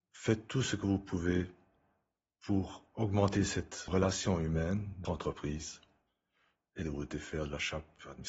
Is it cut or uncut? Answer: cut